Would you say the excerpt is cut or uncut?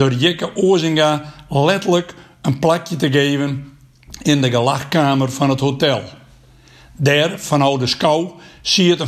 uncut